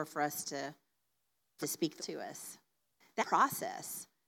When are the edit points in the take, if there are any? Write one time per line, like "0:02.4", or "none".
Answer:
0:01.6
0:02.0
0:03.2